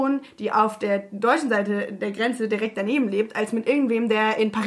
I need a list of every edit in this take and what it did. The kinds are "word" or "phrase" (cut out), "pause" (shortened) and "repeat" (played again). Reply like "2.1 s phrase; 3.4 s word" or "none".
none